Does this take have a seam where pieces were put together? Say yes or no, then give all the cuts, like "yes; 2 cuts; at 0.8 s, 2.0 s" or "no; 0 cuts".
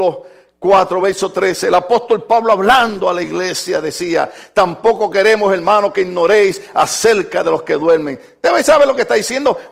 no; 0 cuts